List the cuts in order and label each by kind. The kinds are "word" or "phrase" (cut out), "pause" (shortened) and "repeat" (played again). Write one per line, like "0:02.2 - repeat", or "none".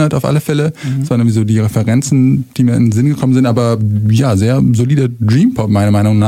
none